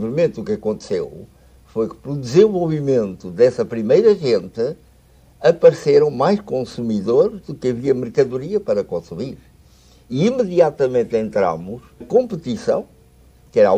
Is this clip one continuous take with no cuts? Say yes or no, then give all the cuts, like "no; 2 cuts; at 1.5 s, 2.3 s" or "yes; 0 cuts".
no; 1 cut; at 12.0 s